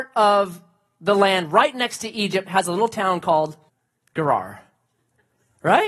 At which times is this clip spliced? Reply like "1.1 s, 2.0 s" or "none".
3.7 s